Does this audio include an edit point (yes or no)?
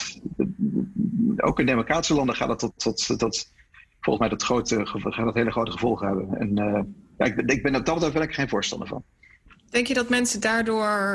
no